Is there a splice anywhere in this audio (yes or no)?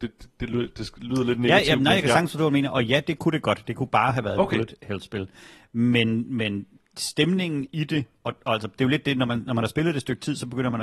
no